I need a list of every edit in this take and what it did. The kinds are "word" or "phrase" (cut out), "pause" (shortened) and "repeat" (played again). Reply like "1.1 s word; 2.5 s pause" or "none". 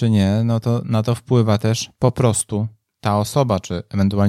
none